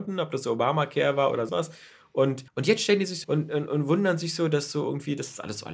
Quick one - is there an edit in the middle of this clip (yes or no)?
yes